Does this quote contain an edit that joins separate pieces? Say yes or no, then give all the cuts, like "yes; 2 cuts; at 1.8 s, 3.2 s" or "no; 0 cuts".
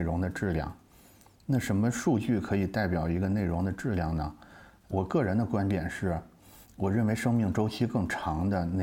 yes; 1 cut; at 6.7 s